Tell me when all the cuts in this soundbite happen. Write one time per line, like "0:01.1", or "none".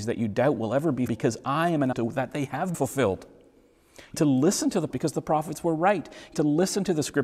0:01.1
0:01.9
0:02.7
0:04.1
0:04.9
0:06.3